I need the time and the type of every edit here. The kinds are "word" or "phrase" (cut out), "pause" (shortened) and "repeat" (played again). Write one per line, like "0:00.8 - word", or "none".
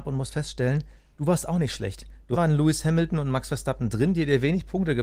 0:02.3 - word